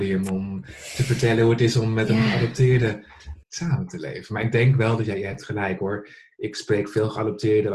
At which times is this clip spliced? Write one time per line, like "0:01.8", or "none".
0:03.4